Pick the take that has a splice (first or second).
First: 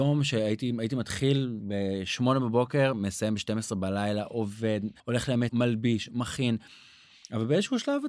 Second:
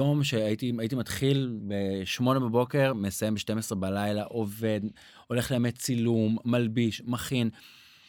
first